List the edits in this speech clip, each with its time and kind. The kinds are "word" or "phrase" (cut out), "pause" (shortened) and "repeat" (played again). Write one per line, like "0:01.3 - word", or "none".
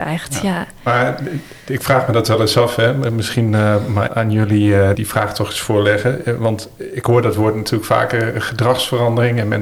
0:04.1 - word
0:04.9 - word